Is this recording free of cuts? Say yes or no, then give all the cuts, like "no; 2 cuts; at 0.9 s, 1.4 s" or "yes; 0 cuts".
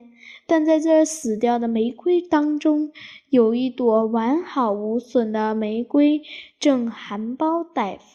yes; 0 cuts